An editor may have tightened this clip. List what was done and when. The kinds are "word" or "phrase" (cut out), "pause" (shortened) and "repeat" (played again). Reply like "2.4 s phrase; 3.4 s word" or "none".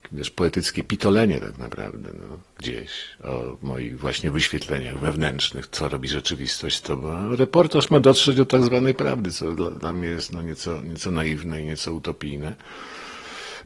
none